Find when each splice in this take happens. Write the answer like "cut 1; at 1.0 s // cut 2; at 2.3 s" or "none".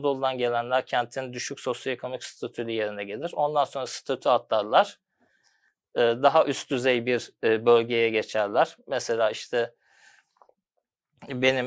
none